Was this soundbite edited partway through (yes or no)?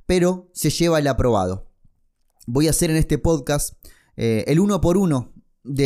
no